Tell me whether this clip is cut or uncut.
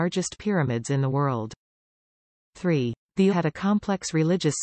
cut